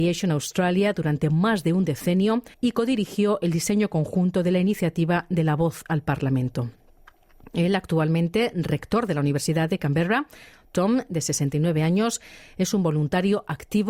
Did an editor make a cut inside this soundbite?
yes; 1 cut; at 2.5 s

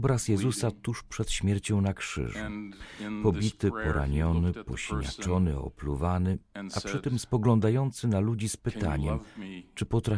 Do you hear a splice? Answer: no; 0 cuts

